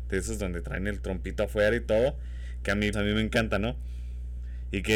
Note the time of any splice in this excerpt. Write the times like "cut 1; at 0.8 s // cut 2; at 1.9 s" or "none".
cut 1; at 2.9 s